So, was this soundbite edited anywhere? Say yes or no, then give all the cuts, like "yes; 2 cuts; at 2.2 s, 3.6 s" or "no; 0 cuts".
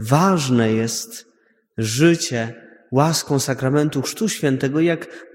no; 0 cuts